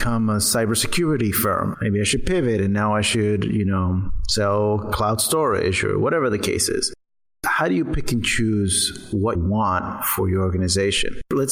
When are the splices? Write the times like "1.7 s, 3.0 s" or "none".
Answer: 9.3 s